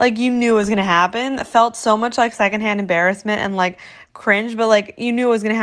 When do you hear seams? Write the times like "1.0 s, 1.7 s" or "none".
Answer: none

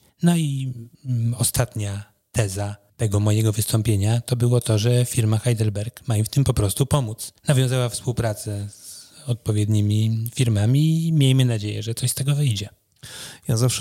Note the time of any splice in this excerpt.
7.4 s

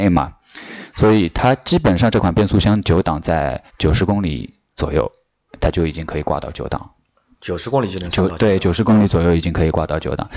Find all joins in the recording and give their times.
3.7 s

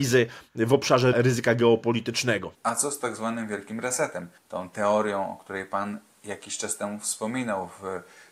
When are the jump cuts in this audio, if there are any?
1.1 s, 2.5 s, 4.4 s

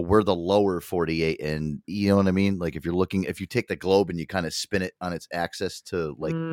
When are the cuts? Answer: 1.8 s

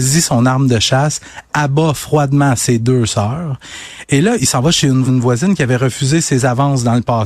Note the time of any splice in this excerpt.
5.1 s

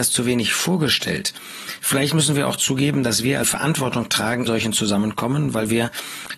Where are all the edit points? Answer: 3.4 s, 4.5 s

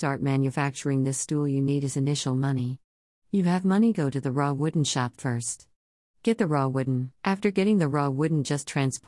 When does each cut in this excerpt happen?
7.2 s

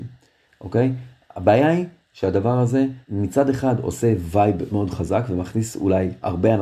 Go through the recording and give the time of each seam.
3.0 s, 4.7 s

